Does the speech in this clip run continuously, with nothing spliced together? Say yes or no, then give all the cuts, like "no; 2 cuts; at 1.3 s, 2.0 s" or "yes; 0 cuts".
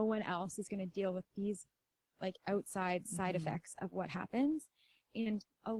yes; 0 cuts